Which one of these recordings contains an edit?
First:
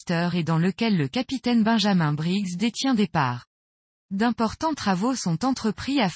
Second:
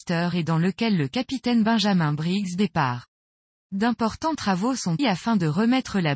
second; 2 cuts; at 2.6 s, 5.0 s

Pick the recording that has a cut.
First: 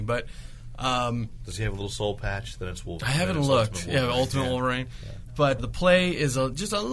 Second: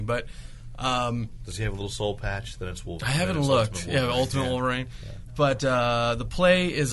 first; 1 cut; at 5.6 s

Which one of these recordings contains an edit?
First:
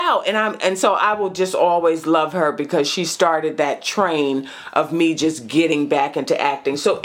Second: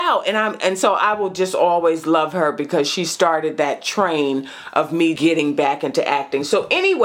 second; 1 cut; at 5.2 s

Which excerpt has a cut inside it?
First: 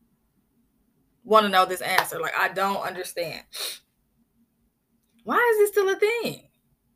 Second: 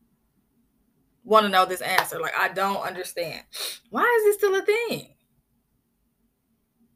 second; 1 cut; at 3.8 s

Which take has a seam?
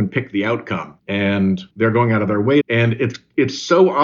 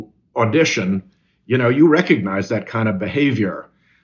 first; 2 cuts; at 1.0 s, 2.6 s

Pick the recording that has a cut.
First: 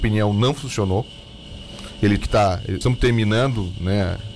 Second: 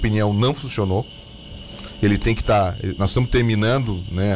first; 2 cuts; at 2.2 s, 2.8 s

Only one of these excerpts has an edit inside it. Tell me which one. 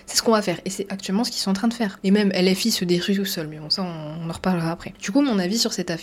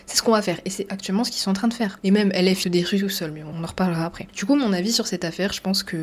second; 2 cuts; at 2.6 s, 3.5 s

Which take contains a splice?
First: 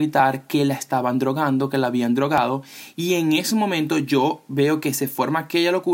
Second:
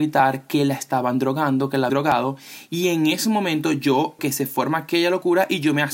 second; 2 cuts; at 1.9 s, 4.2 s

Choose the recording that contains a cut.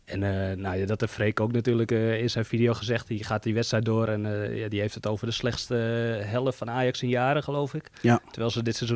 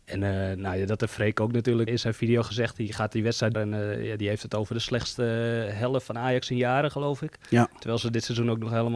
second; 2 cuts; at 1.9 s, 3.5 s

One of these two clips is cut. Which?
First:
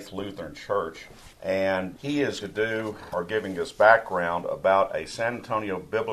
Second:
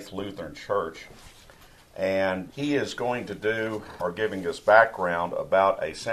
first; 2 cuts; at 1.3 s, 2.4 s

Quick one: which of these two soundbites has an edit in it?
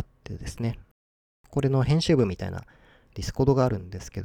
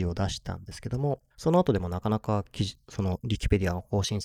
second; 1 cut; at 1.3 s

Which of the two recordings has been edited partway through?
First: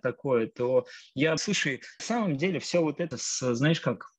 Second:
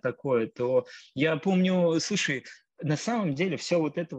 first; 3 cuts; at 1.4 s, 2.0 s, 3.1 s

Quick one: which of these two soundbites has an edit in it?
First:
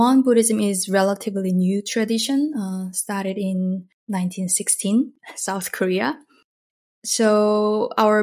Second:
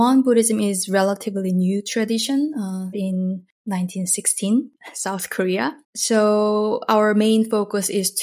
second; 2 cuts; at 2.9 s, 5.8 s

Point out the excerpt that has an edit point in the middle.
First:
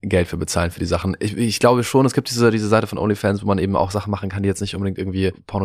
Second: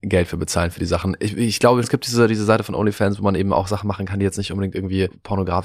second; 1 cut; at 1.8 s

